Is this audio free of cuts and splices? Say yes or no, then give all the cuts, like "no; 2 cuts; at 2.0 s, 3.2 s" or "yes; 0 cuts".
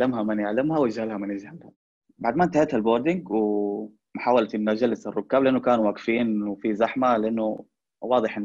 yes; 0 cuts